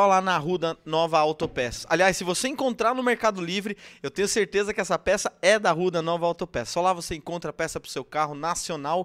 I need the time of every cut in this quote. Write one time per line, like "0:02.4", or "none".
none